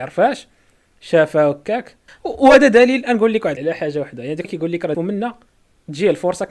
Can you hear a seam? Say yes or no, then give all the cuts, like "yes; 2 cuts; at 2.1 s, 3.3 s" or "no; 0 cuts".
yes; 4 cuts; at 2.1 s, 3.6 s, 4.4 s, 4.9 s